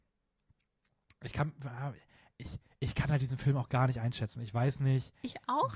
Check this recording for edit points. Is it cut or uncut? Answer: uncut